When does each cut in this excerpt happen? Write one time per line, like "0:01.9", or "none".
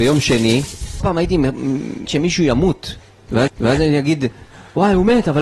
0:01.0
0:02.1
0:03.5